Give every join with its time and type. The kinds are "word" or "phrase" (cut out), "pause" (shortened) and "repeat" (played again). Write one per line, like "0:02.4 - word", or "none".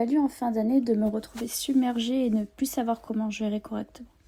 none